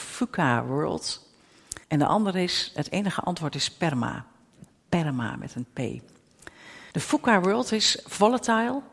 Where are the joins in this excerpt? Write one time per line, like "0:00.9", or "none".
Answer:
0:01.8
0:06.9

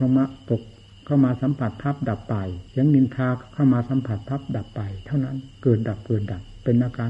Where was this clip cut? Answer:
0:02.7
0:05.5

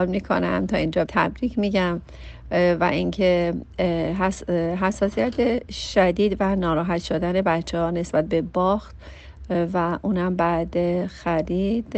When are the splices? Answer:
0:01.1

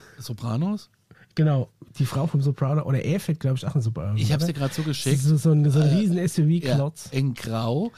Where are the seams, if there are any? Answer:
none

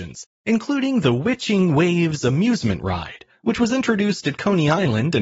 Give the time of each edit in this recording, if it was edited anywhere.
none

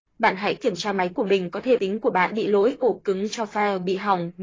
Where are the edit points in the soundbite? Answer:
0:01.1
0:01.8
0:02.3
0:03.3

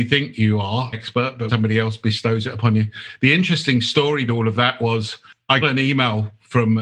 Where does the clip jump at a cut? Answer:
0:00.9
0:01.5
0:04.3
0:05.6

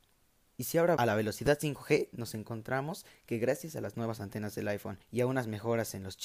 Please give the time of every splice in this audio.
0:01.0
0:05.0

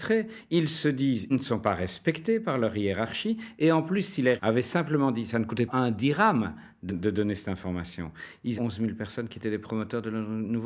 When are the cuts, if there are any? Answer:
0:01.3
0:04.4
0:05.7
0:06.9
0:08.6

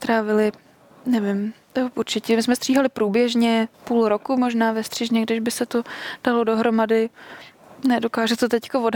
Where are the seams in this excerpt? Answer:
0:03.7

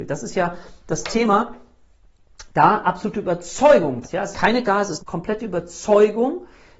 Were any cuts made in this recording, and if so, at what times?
0:02.5
0:02.8
0:04.0
0:04.3
0:04.6
0:05.0

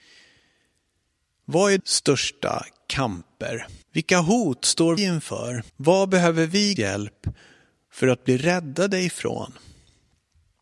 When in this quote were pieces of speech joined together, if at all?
0:01.8
0:03.8
0:05.0
0:05.7
0:06.8

